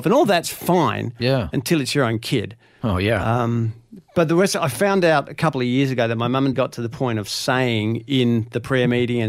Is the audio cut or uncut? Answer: cut